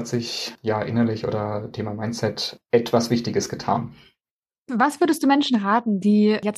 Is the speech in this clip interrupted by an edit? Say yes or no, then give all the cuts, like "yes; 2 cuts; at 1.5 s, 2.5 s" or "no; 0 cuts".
no; 0 cuts